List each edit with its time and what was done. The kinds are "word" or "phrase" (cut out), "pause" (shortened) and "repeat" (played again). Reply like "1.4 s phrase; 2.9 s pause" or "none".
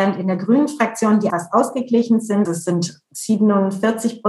1.3 s word; 2.4 s word